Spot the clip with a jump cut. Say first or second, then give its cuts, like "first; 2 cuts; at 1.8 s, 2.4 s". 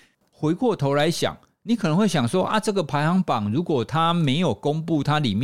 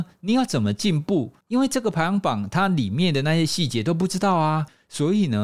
second; 1 cut; at 1.4 s